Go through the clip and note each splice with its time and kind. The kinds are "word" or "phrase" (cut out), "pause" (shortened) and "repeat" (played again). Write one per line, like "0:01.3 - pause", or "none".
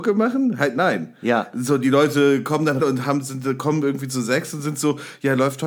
0:02.8 - word